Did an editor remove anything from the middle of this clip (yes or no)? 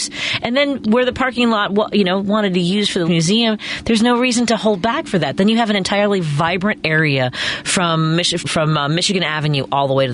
yes